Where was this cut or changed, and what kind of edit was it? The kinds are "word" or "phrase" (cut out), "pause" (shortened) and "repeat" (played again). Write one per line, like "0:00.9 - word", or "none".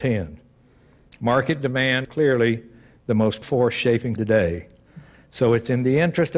0:02.0 - word
0:03.4 - word
0:04.2 - word